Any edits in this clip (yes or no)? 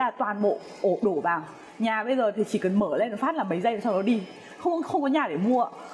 no